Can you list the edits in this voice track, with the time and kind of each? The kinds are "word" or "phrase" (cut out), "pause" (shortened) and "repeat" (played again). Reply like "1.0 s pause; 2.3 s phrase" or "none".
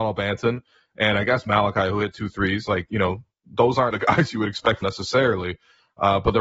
3.9 s word; 4.8 s phrase